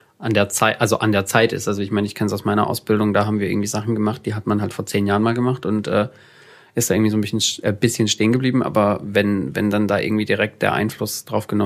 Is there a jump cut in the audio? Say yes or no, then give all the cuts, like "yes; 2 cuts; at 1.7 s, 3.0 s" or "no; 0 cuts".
no; 0 cuts